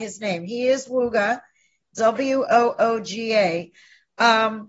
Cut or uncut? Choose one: uncut